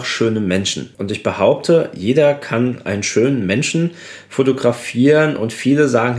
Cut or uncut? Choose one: cut